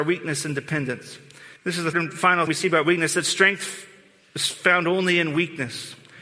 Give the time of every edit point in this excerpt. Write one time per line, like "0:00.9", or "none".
0:01.6
0:01.9
0:02.5